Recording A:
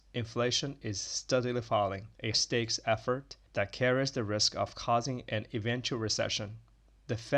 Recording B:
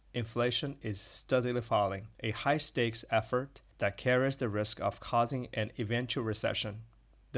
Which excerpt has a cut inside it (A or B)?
A